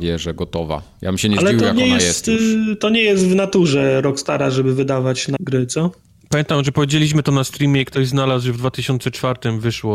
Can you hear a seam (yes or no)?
yes